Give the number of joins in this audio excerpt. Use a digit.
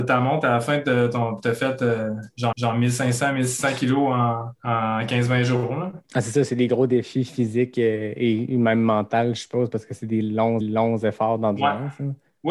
4